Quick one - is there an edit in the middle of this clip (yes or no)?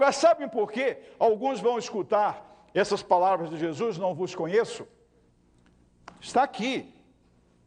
no